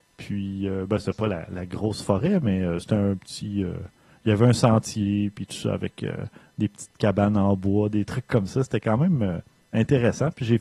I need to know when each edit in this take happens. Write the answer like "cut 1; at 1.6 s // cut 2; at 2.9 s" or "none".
none